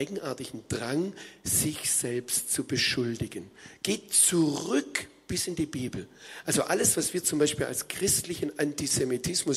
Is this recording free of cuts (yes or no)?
yes